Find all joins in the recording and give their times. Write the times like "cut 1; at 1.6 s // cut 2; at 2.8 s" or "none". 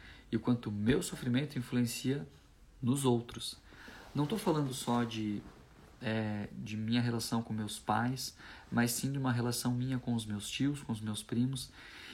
none